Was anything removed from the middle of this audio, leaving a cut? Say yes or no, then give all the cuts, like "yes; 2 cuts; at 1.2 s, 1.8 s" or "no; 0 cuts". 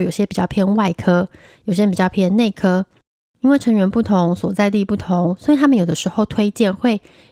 no; 0 cuts